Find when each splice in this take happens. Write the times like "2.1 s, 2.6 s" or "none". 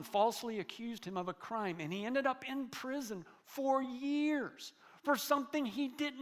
none